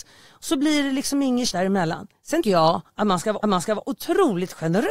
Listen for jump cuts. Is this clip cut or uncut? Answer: cut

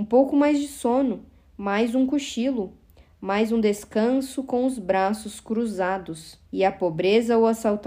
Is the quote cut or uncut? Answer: cut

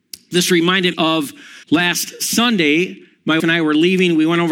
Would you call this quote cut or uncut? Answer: cut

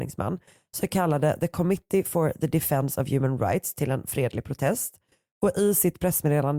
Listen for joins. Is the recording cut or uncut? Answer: uncut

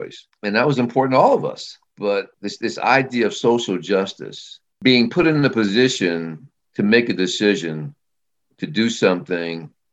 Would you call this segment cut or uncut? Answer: cut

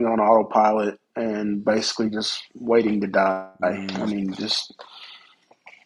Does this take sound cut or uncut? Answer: cut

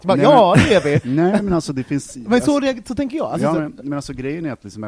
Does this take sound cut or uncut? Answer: uncut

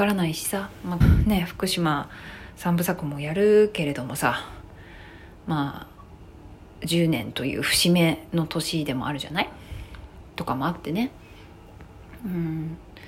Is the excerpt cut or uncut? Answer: cut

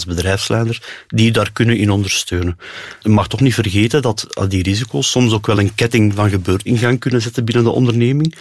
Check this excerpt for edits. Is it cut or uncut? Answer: uncut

